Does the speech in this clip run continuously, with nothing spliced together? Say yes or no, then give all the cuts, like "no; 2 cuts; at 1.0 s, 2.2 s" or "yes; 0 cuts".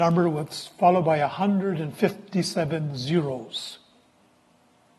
yes; 0 cuts